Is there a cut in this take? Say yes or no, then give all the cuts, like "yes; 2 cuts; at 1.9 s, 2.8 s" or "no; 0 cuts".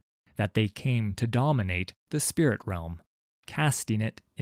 no; 0 cuts